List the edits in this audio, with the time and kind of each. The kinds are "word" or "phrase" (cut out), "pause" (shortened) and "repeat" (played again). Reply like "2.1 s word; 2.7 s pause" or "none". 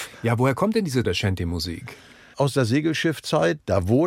1.0 s word